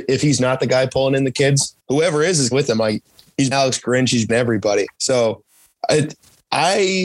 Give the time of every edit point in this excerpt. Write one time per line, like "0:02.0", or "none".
0:01.8
0:02.5
0:03.5
0:04.3
0:04.9